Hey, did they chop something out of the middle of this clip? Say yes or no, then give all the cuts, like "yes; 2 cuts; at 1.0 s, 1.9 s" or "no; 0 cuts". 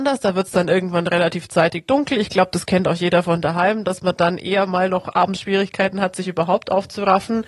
no; 0 cuts